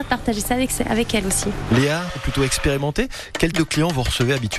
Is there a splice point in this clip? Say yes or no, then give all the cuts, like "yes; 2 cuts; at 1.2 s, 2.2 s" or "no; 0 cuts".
yes; 2 cuts; at 2.1 s, 3.5 s